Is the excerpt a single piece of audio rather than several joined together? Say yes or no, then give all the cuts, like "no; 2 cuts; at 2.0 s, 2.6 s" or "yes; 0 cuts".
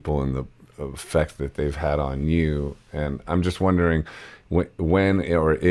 yes; 0 cuts